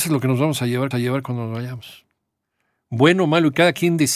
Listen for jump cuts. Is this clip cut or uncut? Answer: cut